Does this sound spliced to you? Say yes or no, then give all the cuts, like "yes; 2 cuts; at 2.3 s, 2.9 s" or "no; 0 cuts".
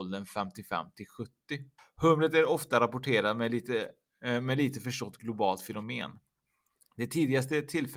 yes; 1 cut; at 1.8 s